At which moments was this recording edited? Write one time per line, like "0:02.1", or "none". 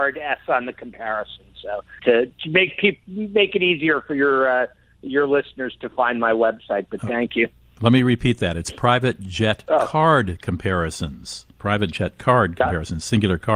0:02.0

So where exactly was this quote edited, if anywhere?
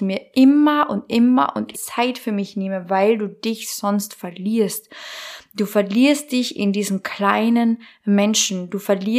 0:01.7

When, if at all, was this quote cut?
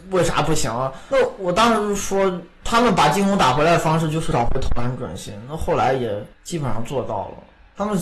0:06.3

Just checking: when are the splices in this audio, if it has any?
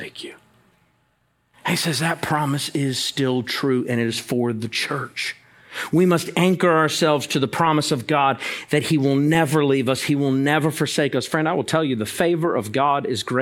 none

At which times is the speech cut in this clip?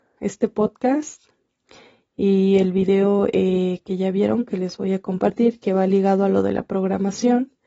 none

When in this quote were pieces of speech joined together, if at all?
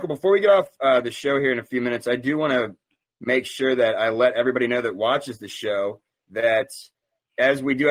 none

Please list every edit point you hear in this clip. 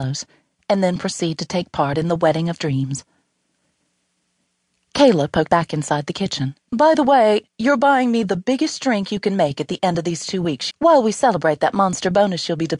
0:02.6
0:05.5
0:06.6
0:07.5
0:10.7

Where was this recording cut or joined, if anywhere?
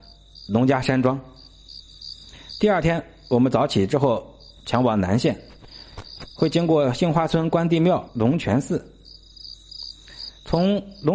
0:08.1

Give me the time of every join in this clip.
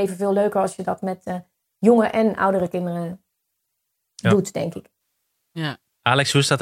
none

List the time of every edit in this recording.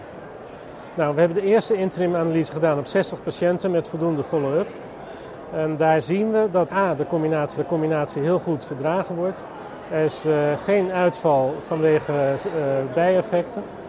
0:06.7
0:07.5

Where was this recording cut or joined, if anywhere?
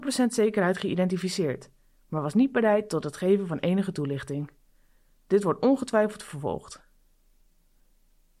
none

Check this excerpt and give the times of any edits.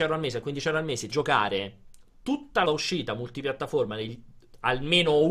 0:01.1
0:02.6

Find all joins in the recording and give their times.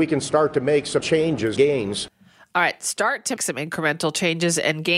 0:01.0
0:01.6
0:03.4

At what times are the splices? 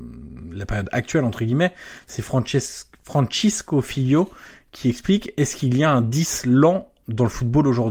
none

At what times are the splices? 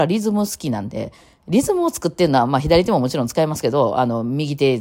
none

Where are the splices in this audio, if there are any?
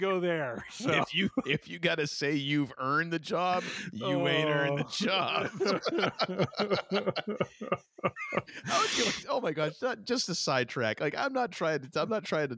none

